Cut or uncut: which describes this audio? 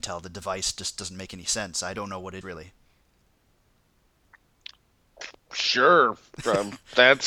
cut